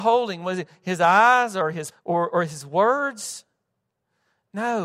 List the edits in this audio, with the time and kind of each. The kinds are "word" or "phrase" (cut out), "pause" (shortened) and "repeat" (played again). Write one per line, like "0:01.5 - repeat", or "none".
0:01.9 - word
0:02.3 - word

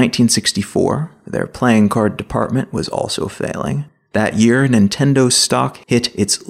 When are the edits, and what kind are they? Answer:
none

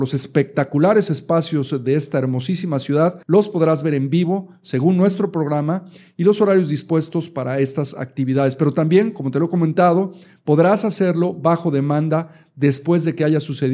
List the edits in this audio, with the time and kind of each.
0:03.2 - pause

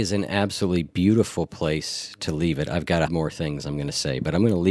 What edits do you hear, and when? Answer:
0:03.1 - word

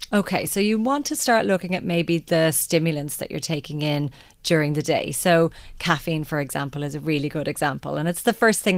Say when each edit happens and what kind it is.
none

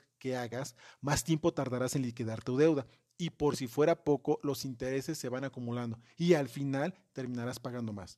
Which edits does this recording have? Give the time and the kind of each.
none

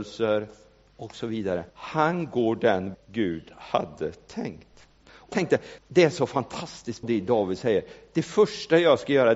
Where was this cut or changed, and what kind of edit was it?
0:01.7 - pause
0:02.9 - word
0:05.3 - word
0:05.8 - pause
0:07.0 - word

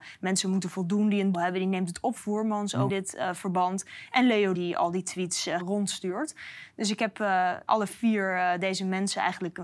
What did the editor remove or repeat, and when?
0:01.3 - word
0:02.2 - word
0:02.9 - word
0:04.5 - word
0:05.6 - word
0:07.7 - word

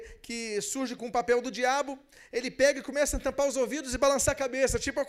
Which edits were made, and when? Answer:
0:01.0 - word

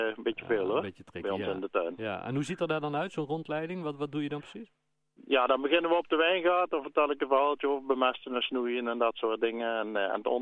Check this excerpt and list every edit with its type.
none

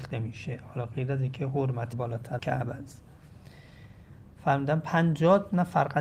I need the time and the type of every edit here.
0:01.9 - word
0:02.4 - word

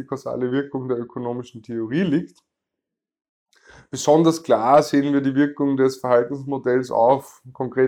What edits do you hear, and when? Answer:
none

